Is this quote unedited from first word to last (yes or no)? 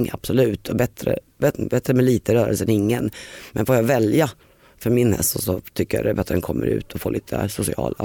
yes